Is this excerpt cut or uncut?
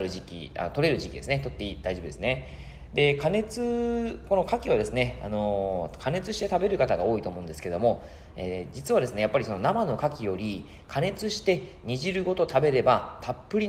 uncut